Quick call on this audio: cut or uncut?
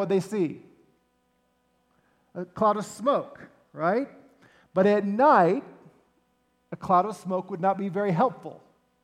uncut